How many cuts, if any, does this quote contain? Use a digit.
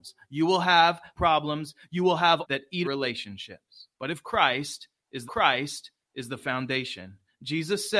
5